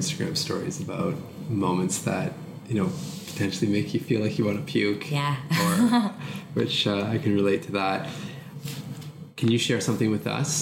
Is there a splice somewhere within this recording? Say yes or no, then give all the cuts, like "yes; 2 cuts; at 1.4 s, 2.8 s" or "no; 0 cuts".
no; 0 cuts